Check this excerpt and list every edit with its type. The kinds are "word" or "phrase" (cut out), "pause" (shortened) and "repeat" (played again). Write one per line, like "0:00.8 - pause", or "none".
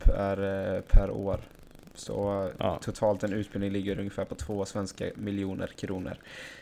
none